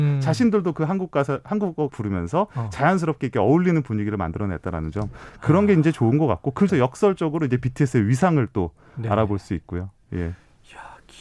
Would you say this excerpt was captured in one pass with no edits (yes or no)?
no